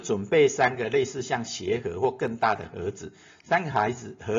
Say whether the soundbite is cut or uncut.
uncut